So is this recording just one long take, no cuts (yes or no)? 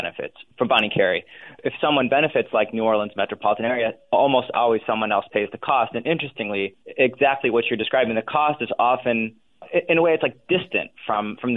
yes